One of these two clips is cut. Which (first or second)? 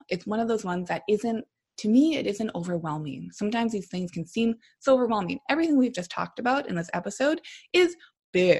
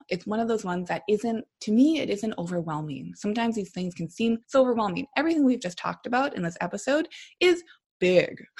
second